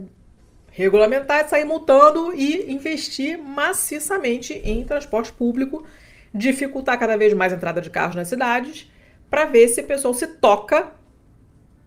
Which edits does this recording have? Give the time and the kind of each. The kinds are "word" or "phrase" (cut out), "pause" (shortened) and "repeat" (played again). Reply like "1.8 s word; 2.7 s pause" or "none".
none